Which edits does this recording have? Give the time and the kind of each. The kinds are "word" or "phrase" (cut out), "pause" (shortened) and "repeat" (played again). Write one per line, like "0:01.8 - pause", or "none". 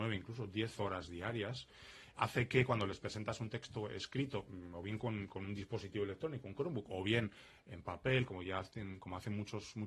0:02.2 - word